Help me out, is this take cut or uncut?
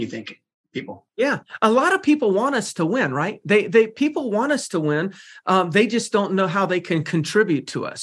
uncut